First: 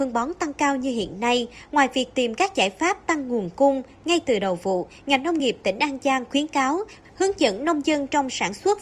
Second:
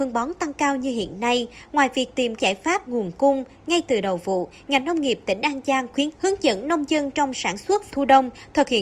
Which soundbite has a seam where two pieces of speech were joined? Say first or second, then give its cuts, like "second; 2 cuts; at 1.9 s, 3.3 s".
second; 4 cuts; at 2.4 s, 2.9 s, 6.1 s, 7.9 s